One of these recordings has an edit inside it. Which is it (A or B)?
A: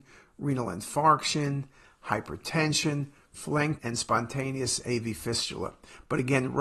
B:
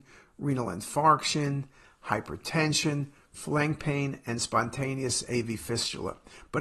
A